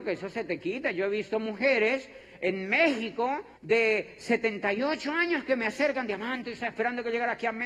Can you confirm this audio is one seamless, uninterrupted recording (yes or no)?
no